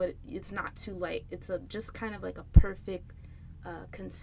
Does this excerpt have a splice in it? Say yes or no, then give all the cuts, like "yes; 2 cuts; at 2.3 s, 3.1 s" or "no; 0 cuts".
no; 0 cuts